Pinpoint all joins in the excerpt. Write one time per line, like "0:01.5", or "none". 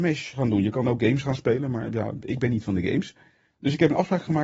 none